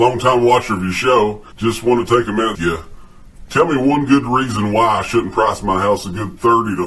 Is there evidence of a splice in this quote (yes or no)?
yes